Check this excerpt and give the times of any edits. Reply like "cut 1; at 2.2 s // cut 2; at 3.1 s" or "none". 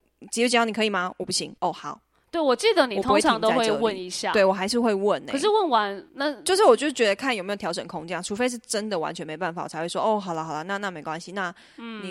cut 1; at 1.6 s // cut 2; at 6.1 s